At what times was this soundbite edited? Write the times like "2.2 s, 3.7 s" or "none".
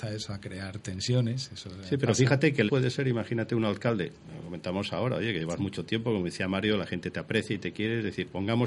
2.7 s